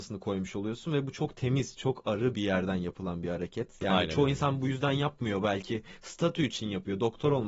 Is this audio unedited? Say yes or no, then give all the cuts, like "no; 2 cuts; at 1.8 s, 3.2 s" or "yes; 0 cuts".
yes; 0 cuts